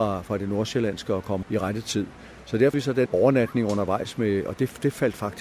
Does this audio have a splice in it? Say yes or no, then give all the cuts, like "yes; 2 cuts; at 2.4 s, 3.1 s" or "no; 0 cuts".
yes; 3 cuts; at 1.4 s, 2.7 s, 3.1 s